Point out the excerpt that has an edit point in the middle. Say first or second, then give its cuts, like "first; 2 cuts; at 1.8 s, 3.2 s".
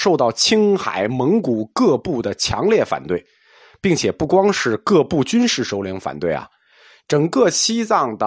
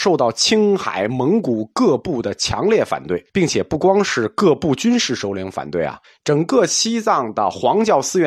second; 2 cuts; at 3.3 s, 6.0 s